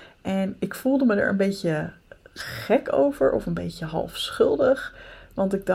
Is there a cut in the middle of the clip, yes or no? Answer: no